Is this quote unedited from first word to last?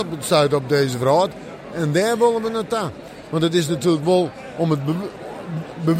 yes; 0 cuts

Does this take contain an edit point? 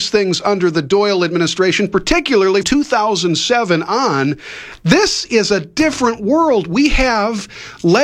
yes; 1 cut; at 2.6 s

